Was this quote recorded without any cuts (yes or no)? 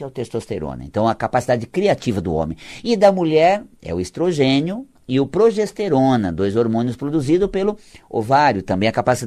yes